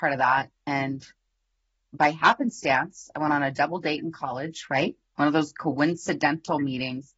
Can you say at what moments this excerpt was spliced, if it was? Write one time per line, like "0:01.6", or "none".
none